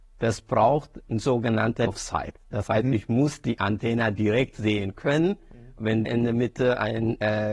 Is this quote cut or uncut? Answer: cut